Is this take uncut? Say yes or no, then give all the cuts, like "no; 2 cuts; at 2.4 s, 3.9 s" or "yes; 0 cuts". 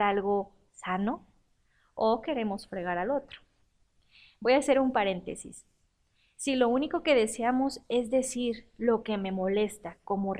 yes; 0 cuts